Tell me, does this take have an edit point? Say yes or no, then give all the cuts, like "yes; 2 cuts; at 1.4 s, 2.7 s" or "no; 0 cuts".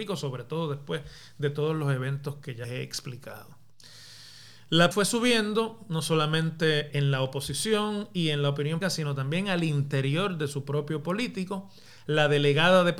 yes; 5 cuts; at 2.6 s, 4.9 s, 6.9 s, 8.8 s, 11.0 s